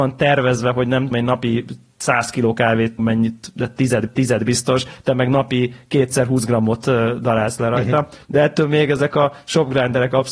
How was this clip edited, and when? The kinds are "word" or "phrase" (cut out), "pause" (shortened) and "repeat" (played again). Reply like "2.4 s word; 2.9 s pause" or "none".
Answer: 1.1 s word; 3.0 s phrase; 4.1 s repeat; 8.2 s pause

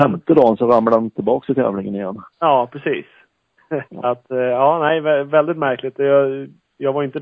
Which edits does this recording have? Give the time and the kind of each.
2.3 s pause; 3.9 s pause

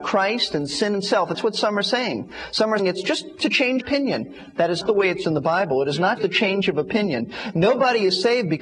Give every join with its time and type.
1.3 s word; 2.8 s word; 3.8 s word; 4.8 s word; 5.2 s word; 6.2 s word

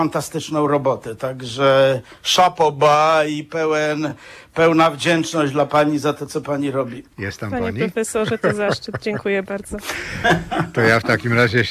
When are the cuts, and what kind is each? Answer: 7.1 s pause

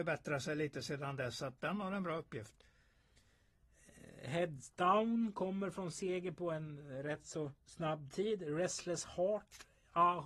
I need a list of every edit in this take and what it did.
7.6 s pause

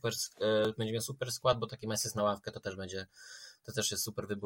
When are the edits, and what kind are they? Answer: none

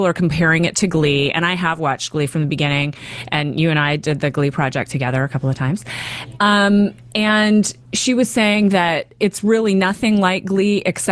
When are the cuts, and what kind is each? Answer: 7.8 s pause

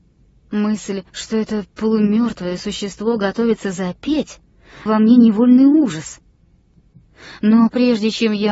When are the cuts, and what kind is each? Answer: 1.1 s pause; 4.9 s word

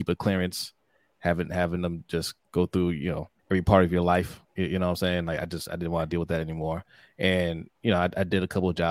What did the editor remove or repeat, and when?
3.4 s pause; 4.4 s pause; 7.7 s pause

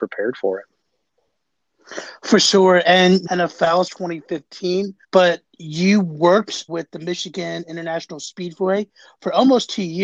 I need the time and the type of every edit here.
3.3 s phrase; 3.9 s word; 5.0 s pause; 6.7 s phrase

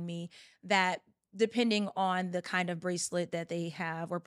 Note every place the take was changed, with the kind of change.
none

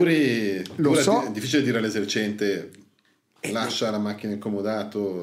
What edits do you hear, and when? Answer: none

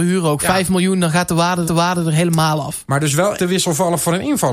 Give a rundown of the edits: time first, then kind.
1.6 s repeat; 3.4 s word

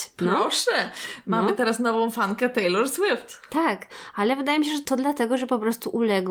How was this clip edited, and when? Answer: none

